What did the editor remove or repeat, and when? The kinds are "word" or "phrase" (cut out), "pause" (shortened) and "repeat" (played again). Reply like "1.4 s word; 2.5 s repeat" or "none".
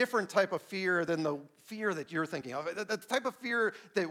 none